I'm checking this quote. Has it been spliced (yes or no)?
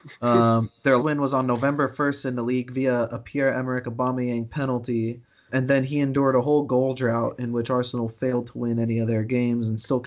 yes